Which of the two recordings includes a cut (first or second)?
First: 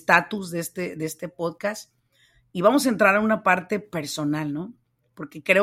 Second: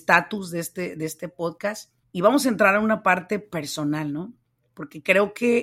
second